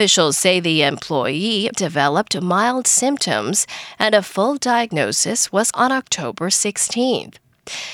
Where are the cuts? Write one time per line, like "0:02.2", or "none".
0:01.7
0:05.7